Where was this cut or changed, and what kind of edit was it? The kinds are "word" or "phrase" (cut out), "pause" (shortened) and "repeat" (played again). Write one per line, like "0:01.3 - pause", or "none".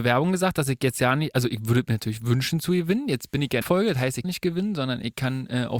0:03.6 - phrase
0:04.2 - phrase